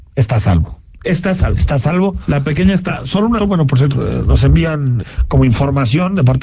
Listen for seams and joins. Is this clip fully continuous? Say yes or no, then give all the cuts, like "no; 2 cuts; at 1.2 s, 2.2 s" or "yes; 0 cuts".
no; 4 cuts; at 2.9 s, 3.4 s, 3.9 s, 5.0 s